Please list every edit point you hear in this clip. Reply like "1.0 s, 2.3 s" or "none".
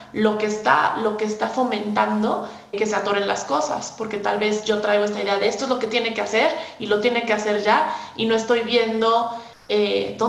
2.7 s